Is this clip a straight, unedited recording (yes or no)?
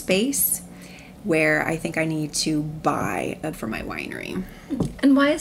no